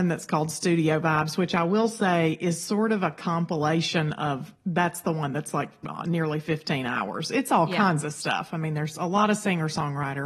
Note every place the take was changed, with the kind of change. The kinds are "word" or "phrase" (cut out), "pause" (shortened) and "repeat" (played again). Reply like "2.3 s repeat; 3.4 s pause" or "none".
4.6 s pause